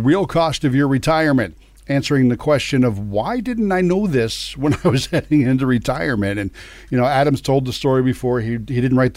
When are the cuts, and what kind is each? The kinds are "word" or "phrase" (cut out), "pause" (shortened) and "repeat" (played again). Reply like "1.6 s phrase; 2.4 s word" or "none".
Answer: none